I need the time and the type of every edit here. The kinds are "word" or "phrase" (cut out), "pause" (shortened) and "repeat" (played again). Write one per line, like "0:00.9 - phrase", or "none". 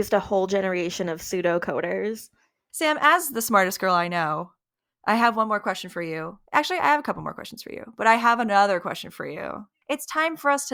0:06.5 - pause